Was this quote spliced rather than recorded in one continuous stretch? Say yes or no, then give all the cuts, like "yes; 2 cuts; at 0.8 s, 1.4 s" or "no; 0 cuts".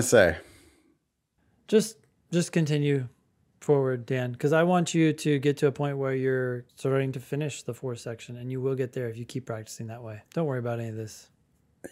yes; 2 cuts; at 6.7 s, 10.3 s